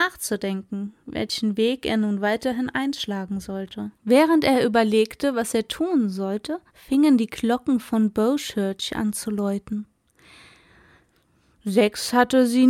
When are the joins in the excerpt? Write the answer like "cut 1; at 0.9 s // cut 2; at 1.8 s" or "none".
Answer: cut 1; at 3.9 s // cut 2; at 6.7 s